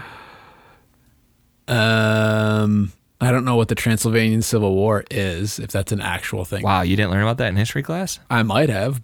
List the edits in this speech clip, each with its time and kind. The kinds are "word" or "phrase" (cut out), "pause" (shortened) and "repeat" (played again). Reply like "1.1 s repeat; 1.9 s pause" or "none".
none